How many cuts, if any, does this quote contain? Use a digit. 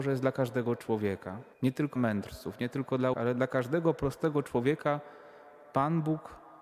3